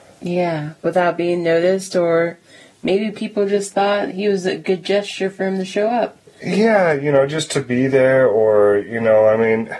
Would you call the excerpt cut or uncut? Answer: uncut